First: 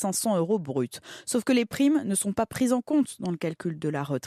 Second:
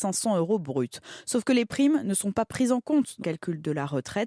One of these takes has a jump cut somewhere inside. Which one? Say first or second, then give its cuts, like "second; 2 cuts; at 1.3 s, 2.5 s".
second; 1 cut; at 3.2 s